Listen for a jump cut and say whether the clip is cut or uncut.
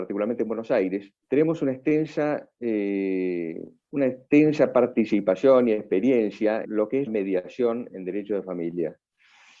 cut